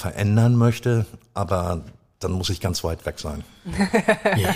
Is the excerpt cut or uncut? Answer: uncut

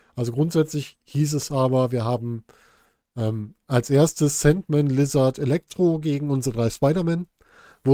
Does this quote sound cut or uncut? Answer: uncut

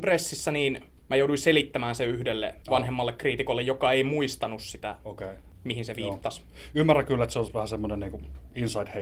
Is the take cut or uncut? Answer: cut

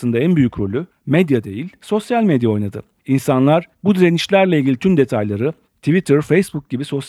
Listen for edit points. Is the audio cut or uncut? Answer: uncut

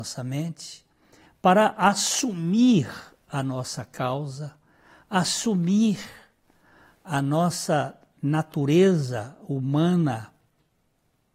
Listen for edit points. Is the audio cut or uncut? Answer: uncut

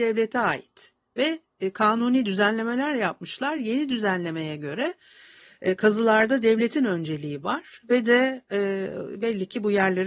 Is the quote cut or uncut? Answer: uncut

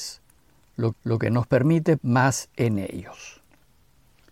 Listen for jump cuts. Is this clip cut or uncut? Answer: cut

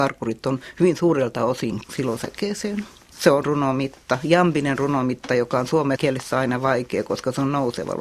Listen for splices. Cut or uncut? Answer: cut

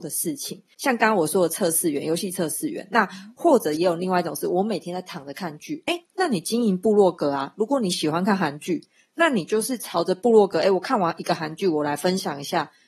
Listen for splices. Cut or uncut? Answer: uncut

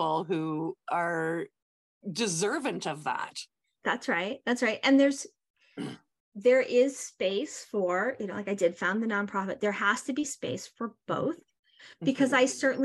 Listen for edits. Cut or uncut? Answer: uncut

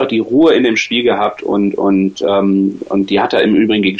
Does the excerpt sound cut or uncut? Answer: uncut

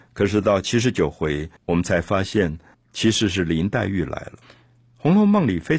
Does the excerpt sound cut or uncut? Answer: cut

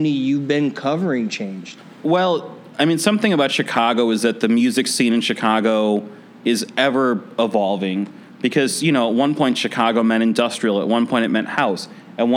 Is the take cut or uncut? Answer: uncut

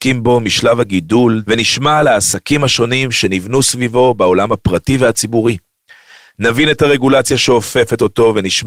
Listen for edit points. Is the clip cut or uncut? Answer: cut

